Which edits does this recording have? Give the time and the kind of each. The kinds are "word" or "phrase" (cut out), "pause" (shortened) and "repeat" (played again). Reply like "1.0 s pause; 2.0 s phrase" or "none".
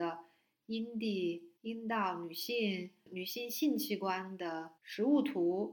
1.6 s pause; 4.8 s pause